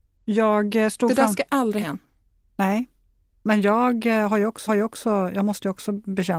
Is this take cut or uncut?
cut